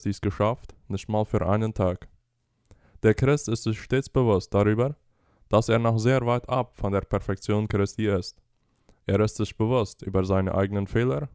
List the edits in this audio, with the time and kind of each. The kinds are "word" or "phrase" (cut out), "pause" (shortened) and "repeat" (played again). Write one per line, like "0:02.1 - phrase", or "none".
none